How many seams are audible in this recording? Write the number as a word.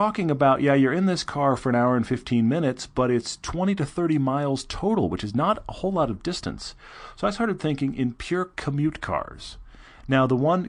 zero